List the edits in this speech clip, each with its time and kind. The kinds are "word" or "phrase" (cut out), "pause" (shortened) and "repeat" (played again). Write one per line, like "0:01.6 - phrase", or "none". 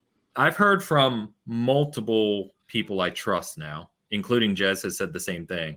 0:04.1 - word